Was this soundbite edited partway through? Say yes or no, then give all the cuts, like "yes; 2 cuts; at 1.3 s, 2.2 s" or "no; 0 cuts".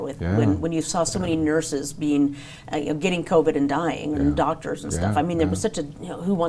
no; 0 cuts